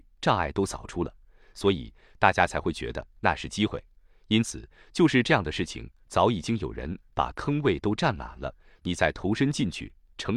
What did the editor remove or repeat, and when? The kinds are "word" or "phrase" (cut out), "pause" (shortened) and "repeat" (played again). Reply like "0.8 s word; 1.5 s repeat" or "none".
none